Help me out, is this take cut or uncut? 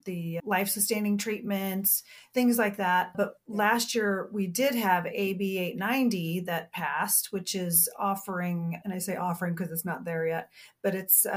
uncut